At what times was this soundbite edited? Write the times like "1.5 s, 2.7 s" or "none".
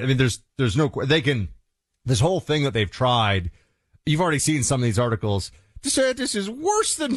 none